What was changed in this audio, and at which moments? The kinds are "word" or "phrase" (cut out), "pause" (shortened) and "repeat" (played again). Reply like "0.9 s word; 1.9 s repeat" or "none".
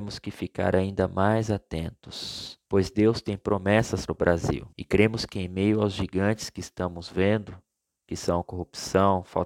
2.6 s pause; 4.1 s word; 4.7 s pause